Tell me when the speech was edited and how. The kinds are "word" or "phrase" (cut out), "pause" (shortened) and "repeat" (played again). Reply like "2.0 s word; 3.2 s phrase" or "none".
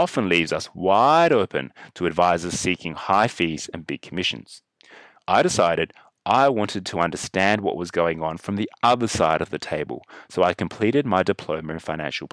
none